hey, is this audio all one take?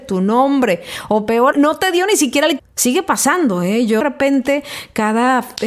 no; 3 cuts; at 1.5 s, 2.6 s, 4.0 s

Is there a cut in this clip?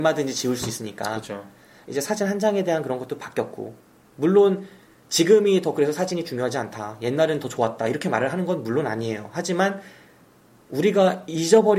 no; 0 cuts

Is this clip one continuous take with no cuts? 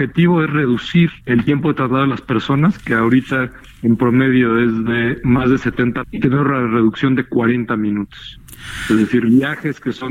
no; 2 cuts; at 1.2 s, 6.0 s

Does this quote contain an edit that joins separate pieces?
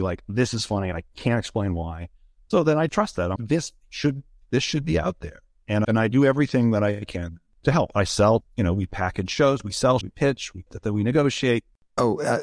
yes; 6 cuts; at 2.9 s, 3.4 s, 5.8 s, 8.4 s, 10.0 s, 10.7 s

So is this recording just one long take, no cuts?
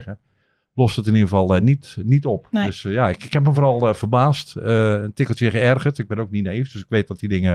yes; 0 cuts

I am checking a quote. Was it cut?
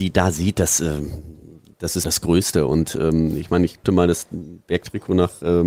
yes; 2 cuts; at 2.0 s, 3.8 s

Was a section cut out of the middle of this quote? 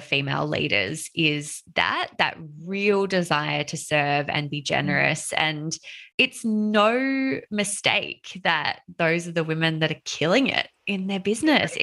yes; 1 cut; at 6.1 s

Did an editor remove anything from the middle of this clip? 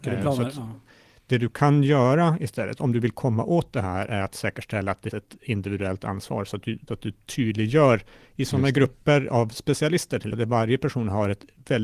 yes; 3 cuts; at 5.1 s, 6.9 s, 10.3 s

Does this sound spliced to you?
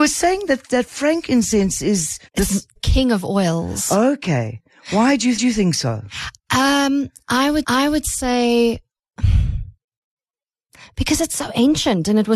yes; 4 cuts; at 2.3 s, 2.8 s, 5.4 s, 7.6 s

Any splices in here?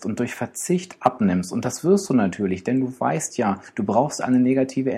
no; 0 cuts

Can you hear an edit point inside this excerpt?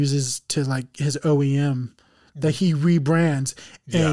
no; 0 cuts

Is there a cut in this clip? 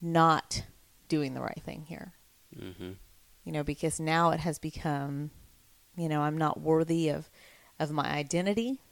no; 0 cuts

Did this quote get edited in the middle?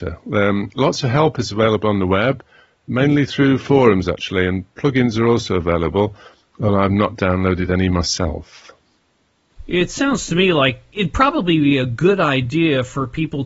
no; 0 cuts

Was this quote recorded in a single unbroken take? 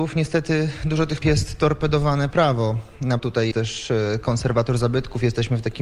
no; 4 cuts; at 1.2 s, 2.3 s, 3.2 s, 3.5 s

